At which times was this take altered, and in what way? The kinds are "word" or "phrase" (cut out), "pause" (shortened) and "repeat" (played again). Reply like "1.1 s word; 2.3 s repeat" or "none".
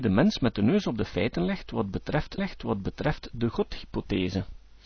2.4 s repeat